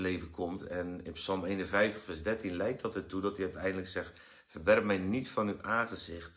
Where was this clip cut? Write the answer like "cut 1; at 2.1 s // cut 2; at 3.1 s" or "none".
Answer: none